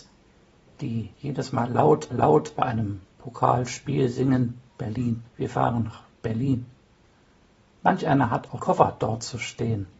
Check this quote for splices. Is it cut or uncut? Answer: cut